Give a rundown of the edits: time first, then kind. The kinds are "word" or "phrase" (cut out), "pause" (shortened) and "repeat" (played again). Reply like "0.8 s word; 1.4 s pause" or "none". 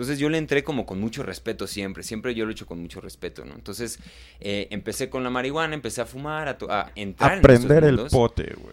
6.9 s word